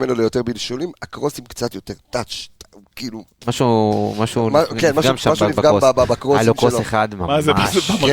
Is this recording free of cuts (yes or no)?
yes